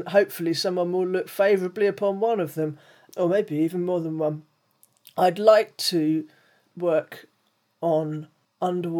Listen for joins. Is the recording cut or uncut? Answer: uncut